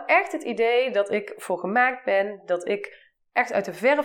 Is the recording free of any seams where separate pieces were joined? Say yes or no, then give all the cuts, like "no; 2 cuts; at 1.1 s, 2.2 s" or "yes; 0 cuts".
yes; 0 cuts